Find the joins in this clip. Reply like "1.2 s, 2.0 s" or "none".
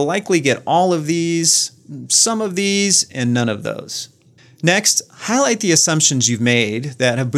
4.4 s